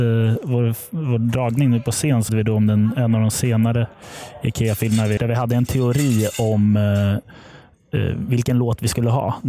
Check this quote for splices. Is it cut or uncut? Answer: cut